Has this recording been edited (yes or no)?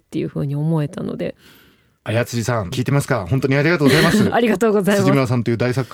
no